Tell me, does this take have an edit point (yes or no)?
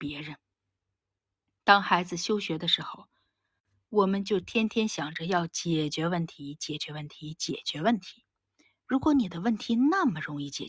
no